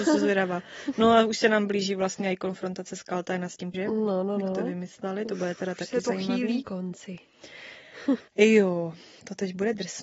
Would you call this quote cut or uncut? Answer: cut